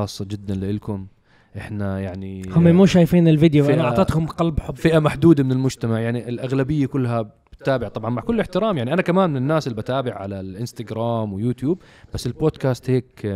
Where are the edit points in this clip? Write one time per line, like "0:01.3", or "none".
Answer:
none